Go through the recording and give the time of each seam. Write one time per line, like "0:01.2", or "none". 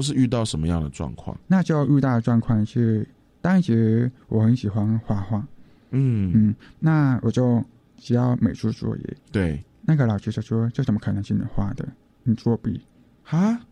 0:09.2